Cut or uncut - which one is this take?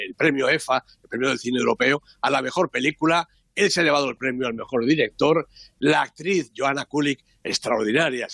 uncut